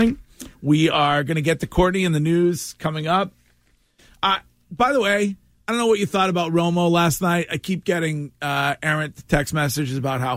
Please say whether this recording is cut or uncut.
uncut